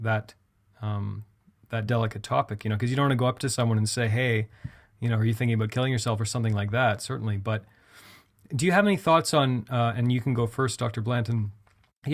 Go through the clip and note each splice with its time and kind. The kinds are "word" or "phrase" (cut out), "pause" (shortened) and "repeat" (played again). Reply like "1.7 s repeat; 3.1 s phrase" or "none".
1.9 s word